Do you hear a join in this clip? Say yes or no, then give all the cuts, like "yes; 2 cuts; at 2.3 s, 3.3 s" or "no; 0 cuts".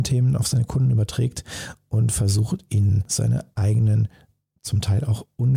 no; 0 cuts